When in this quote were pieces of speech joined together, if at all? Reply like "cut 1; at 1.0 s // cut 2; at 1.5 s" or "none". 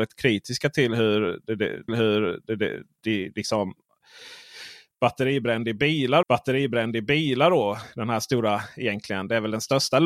cut 1; at 1.9 s // cut 2; at 6.2 s